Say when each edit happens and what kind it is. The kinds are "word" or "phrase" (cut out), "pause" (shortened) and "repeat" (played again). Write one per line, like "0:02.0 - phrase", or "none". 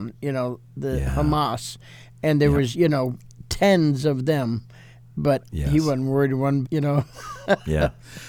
0:02.7 - word
0:06.6 - word